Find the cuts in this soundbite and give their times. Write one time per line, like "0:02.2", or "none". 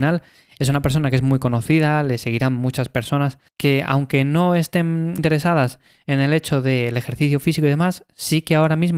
0:03.5
0:05.2

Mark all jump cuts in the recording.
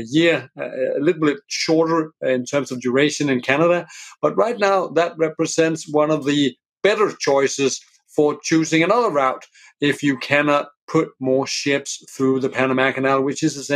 none

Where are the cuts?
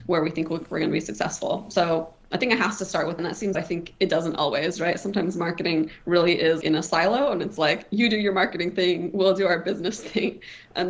0:03.2
0:03.5
0:06.6

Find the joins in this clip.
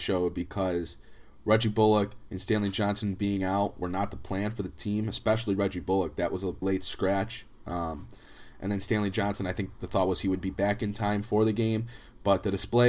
0:06.6

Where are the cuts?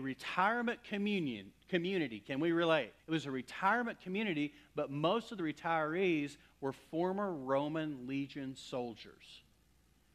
0:03.0

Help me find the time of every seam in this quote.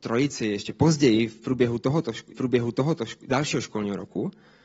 0:02.3

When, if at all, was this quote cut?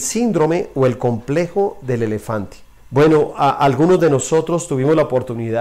0:02.8

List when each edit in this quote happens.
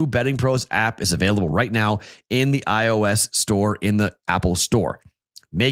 none

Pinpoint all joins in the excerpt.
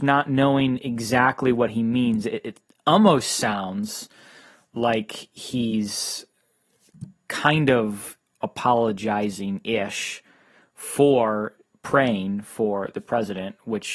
none

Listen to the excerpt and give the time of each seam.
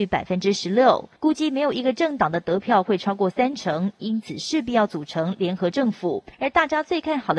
0:01.2
0:06.3

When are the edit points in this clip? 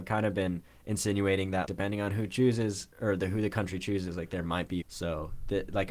0:01.6
0:02.9
0:04.8

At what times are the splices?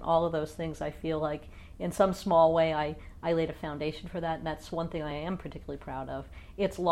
none

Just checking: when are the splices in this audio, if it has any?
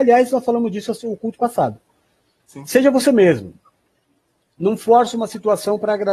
none

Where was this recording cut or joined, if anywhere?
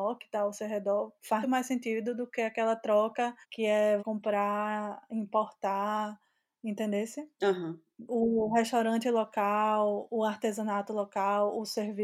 0:01.4
0:03.4
0:04.0
0:07.3

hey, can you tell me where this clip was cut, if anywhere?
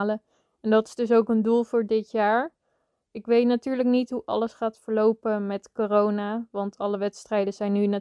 none

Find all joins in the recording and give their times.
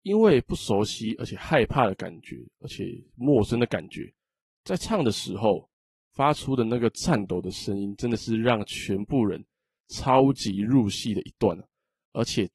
none

